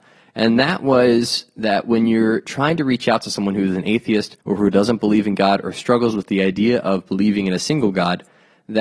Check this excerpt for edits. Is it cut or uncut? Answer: cut